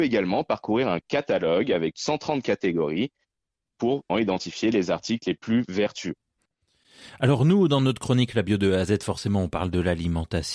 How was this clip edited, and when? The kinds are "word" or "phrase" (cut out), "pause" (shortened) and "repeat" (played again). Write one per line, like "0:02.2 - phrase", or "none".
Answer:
0:01.9 - word
0:04.1 - word